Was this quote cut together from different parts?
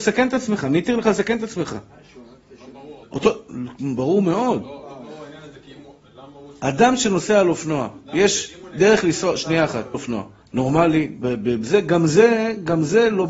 yes; 3 cuts; at 3.0 s, 9.9 s, 10.4 s

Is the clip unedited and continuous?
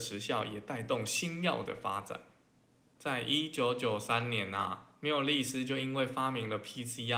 yes; 0 cuts

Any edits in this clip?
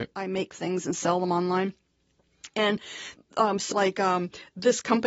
yes; 2 cuts; at 3.2 s, 3.7 s

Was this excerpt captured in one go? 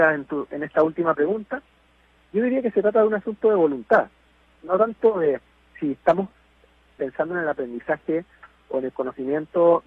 yes; 0 cuts

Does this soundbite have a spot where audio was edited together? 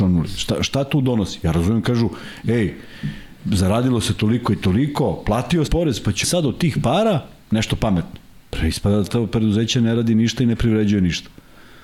yes; 3 cuts; at 5.7 s, 6.2 s, 9.1 s

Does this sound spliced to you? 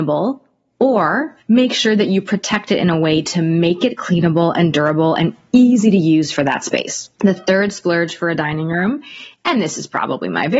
yes; 2 cuts; at 1.4 s, 7.1 s

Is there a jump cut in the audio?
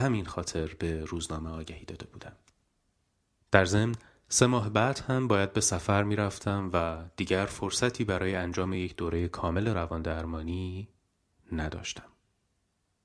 no; 0 cuts

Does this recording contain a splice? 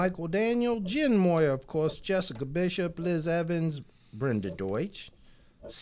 no; 0 cuts

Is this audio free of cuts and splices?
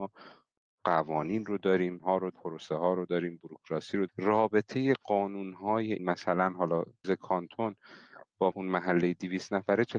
no; 6 cuts; at 2.0 s, 2.3 s, 4.1 s, 6.0 s, 7.0 s, 8.5 s

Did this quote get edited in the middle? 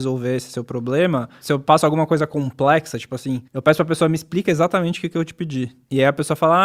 yes; 1 cut; at 3.5 s

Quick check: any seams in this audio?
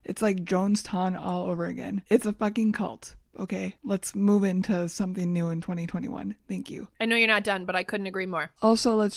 no; 0 cuts

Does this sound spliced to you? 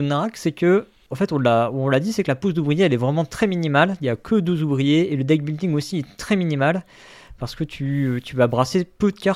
no; 0 cuts

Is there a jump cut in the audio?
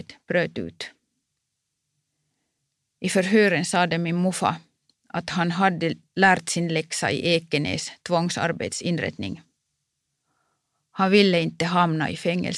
no; 0 cuts

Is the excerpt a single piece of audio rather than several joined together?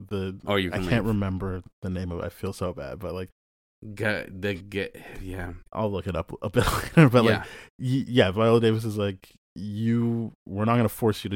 no; 1 cut; at 5.7 s

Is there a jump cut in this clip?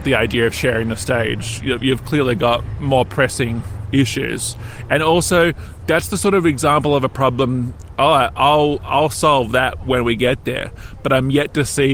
no; 0 cuts

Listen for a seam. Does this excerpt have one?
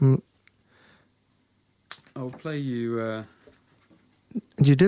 no; 0 cuts

